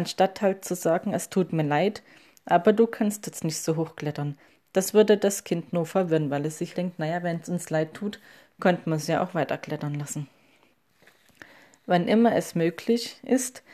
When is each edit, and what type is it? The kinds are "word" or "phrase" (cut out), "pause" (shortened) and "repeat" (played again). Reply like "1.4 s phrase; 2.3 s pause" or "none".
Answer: 6.7 s word